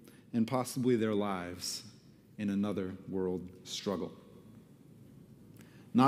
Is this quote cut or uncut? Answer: uncut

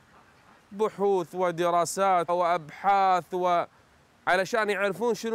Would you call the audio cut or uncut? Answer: cut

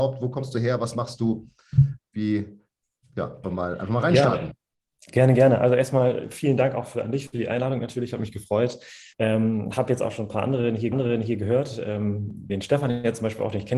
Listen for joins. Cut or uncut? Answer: cut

